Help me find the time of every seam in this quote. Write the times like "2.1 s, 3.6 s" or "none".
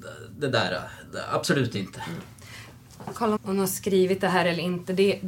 3.4 s